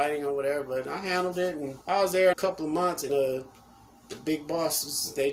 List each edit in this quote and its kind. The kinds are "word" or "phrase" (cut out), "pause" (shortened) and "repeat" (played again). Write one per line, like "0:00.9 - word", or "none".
0:01.8 - pause
0:02.3 - word
0:03.1 - word